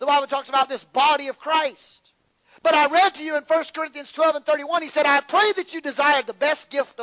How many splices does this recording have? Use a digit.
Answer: 0